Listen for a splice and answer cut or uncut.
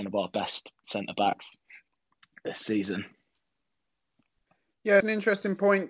uncut